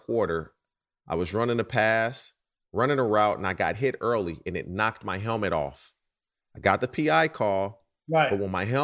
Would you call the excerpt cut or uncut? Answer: uncut